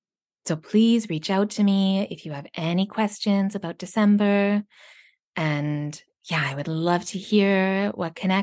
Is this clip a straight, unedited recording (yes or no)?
yes